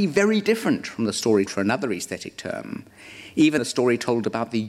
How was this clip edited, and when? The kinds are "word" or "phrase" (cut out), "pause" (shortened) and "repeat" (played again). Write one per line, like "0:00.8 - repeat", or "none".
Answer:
0:01.5 - word
0:03.6 - word